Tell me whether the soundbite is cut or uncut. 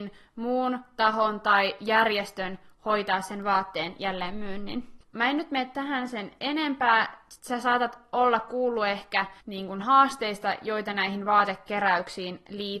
cut